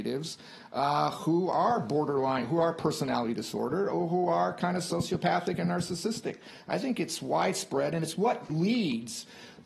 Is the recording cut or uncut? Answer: cut